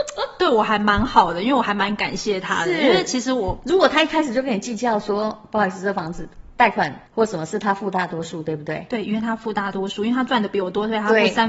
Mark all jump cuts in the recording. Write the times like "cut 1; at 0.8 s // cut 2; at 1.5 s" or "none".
cut 1; at 7.1 s